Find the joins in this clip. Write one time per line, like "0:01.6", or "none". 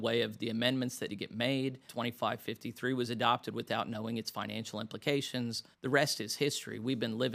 0:01.1
0:01.9
0:05.7

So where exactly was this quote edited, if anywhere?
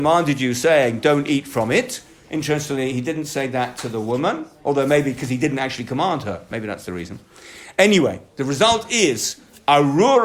none

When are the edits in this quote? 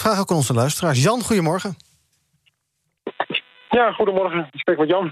none

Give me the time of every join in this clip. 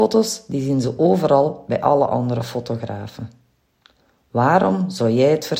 none

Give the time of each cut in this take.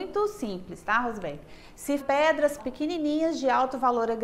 0:02.0
0:02.6

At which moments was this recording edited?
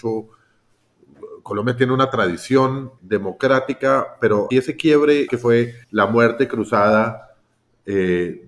0:03.0
0:04.5
0:05.3
0:05.8

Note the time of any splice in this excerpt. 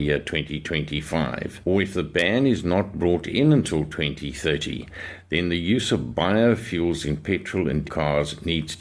0:07.8

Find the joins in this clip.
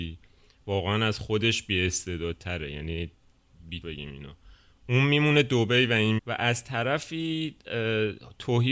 0:03.8
0:06.2

